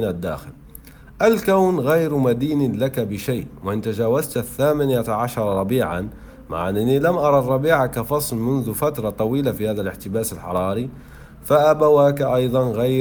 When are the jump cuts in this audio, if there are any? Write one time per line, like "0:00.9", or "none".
none